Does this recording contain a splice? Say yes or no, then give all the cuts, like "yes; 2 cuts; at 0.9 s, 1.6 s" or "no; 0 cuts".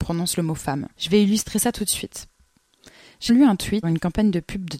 yes; 3 cuts; at 0.9 s, 3.3 s, 3.8 s